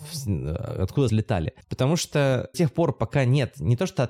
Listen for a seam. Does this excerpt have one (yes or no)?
yes